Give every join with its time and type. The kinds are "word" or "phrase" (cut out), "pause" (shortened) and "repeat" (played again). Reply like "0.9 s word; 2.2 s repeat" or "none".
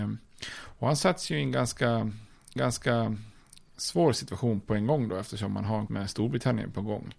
2.6 s repeat; 5.9 s word